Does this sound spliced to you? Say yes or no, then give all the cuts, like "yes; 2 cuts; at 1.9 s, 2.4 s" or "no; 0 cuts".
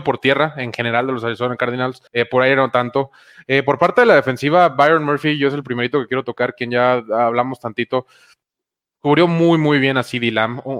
yes; 1 cut; at 2.1 s